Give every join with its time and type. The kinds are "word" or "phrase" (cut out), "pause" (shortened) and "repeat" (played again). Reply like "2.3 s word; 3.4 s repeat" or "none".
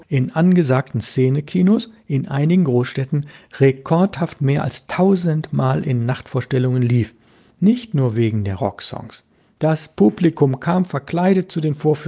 none